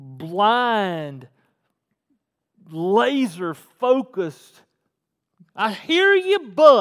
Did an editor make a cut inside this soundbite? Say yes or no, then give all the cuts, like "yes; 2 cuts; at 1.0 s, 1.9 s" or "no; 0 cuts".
no; 0 cuts